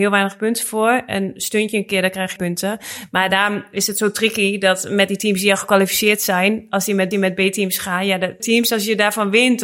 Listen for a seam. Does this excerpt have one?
yes; 3 cuts; at 2.4 s, 7.1 s, 8.4 s

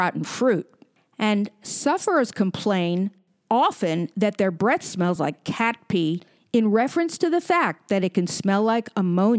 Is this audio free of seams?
yes; 0 cuts

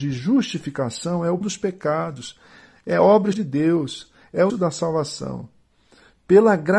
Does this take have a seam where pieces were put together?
yes; 3 cuts; at 1.4 s, 3.3 s, 4.5 s

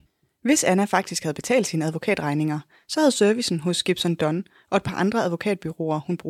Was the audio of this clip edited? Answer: no; 0 cuts

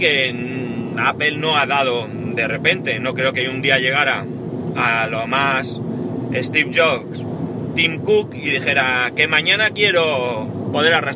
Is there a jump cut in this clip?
no; 0 cuts

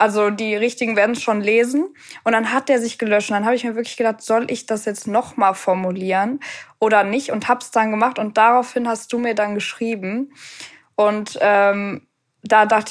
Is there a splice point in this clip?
no; 0 cuts

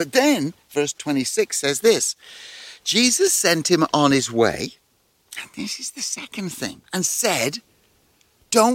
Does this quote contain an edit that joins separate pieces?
yes; 1 cut; at 6.8 s

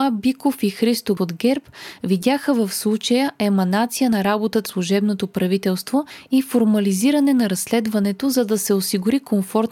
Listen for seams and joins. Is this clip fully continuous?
no; 2 cuts; at 1.2 s, 4.7 s

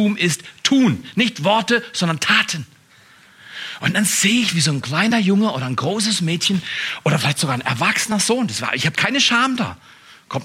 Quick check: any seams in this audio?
no; 0 cuts

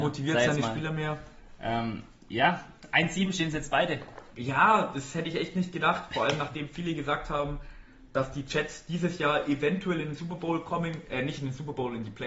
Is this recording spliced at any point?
no; 0 cuts

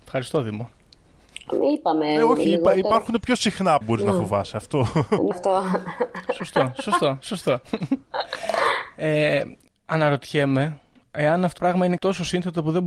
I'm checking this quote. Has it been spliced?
yes; 5 cuts; at 3.8 s, 5.3 s, 9.7 s, 11.6 s, 12.0 s

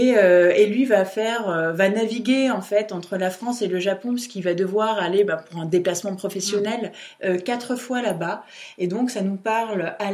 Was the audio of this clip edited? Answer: no; 0 cuts

